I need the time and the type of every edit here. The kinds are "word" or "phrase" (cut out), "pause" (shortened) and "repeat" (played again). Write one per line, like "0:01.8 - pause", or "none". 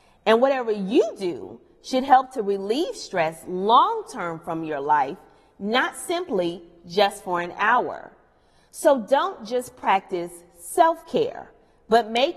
none